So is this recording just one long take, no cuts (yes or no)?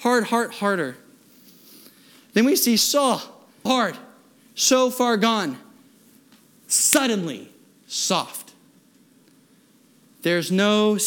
no